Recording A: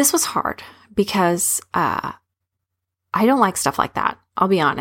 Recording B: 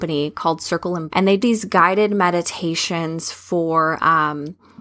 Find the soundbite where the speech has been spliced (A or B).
B